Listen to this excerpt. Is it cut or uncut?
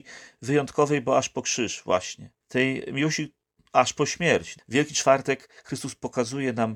cut